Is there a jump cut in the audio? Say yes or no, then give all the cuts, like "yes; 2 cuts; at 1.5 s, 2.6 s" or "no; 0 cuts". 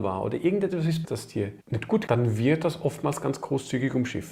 yes; 3 cuts; at 1.0 s, 1.6 s, 2.1 s